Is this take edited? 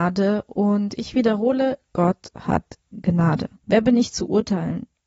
yes; 1 cut; at 3.6 s

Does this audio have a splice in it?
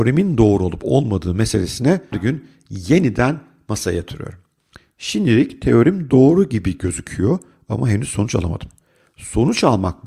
yes; 1 cut; at 2.1 s

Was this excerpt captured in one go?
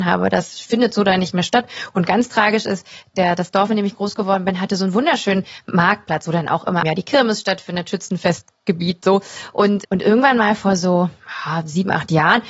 no; 2 cuts; at 6.8 s, 9.8 s

